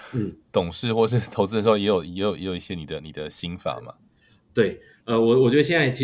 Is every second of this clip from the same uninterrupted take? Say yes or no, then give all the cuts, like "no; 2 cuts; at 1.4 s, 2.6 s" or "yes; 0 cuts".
yes; 0 cuts